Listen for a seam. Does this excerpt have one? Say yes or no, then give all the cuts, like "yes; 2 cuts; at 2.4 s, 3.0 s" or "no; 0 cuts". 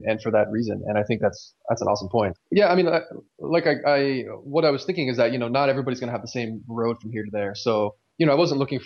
yes; 2 cuts; at 1.6 s, 3.3 s